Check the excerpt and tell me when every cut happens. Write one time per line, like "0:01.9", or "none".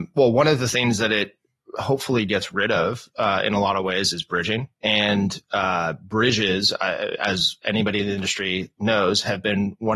0:04.7

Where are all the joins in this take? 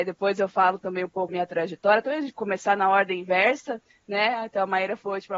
0:01.3
0:02.3

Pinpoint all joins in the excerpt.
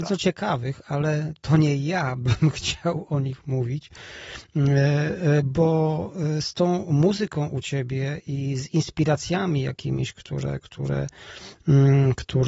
none

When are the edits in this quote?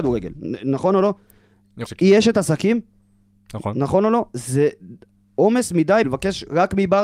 0:01.9
0:06.0

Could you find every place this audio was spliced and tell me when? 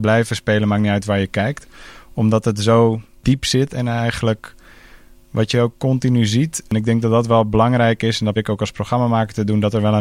0:08.4

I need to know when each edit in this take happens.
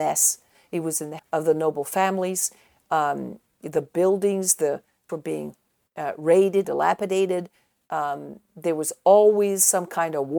0:01.2
0:05.1
0:06.6

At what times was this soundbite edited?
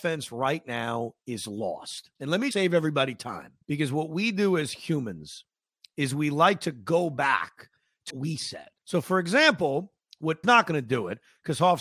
0:02.2
0:02.5
0:03.6
0:08.1
0:08.8
0:10.4

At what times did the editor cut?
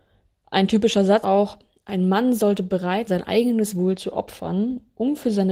0:01.2
0:03.1

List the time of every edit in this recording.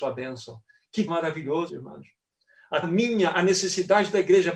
0:01.1
0:01.7
0:02.8

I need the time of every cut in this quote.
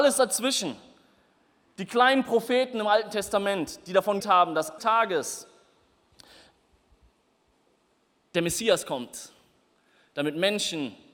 0:04.2
0:04.8

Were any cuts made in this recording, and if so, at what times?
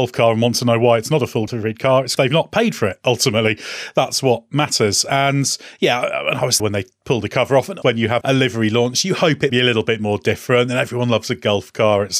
0:01.5
0:02.2
0:06.6
0:07.8
0:08.2
0:09.5

